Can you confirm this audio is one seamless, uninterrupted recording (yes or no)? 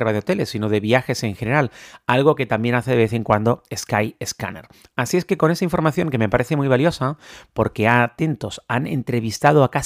yes